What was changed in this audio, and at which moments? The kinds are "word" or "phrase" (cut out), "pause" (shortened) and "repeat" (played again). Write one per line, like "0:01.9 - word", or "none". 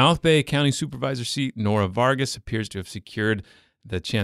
none